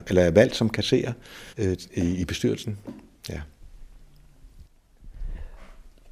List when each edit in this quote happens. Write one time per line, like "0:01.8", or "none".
0:01.5

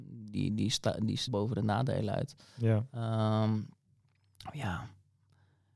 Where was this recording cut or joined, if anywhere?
0:01.3

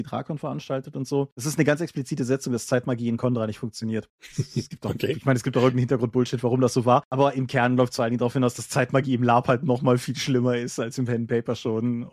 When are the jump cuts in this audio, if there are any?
0:10.0

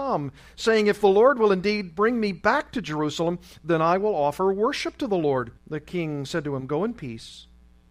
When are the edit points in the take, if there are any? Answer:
0:05.6

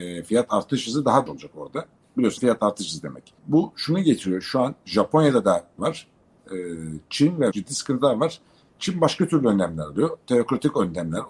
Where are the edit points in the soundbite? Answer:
0:01.3
0:02.4
0:03.4
0:05.8
0:07.5

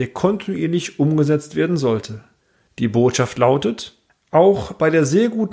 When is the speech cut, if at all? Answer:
none

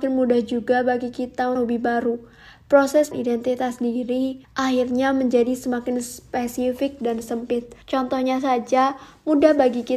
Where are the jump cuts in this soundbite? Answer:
0:01.6
0:03.1
0:04.4
0:07.8

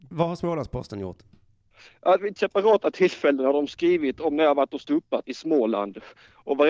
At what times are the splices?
0:02.4
0:05.2

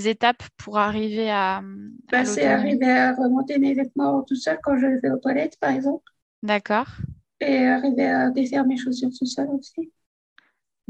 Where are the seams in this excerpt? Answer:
none

